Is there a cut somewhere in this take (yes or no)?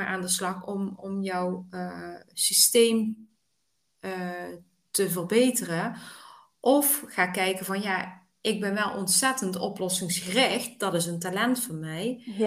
no